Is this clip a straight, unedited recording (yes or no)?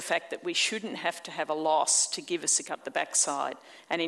no